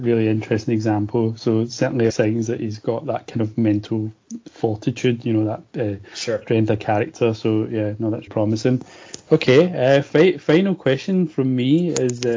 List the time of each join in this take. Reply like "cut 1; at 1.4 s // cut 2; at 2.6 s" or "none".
cut 1; at 2.1 s // cut 2; at 8.3 s